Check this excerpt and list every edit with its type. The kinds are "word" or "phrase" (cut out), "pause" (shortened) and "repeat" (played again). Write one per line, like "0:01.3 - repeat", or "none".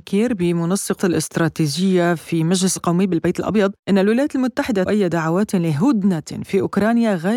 0:01.0 - word
0:02.8 - word
0:03.8 - pause
0:04.9 - word